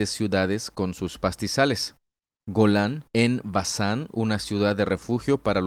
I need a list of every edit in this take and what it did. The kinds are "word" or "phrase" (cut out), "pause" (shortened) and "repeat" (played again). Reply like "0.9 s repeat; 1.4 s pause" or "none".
3.1 s pause